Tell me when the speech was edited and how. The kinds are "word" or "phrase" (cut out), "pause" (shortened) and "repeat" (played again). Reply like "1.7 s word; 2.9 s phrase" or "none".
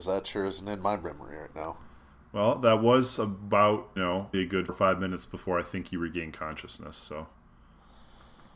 4.0 s word; 4.3 s word; 4.7 s word